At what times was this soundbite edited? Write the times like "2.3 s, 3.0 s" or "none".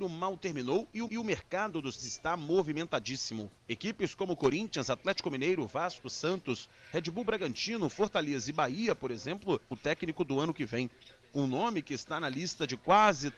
1.1 s, 2.0 s, 3.6 s, 9.7 s